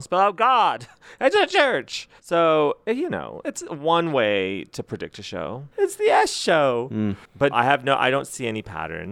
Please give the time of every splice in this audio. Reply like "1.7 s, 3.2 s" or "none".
1.3 s, 2.2 s, 3.4 s, 5.7 s, 7.5 s